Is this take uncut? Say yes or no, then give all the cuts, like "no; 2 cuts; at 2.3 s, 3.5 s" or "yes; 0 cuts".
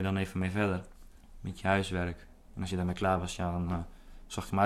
yes; 0 cuts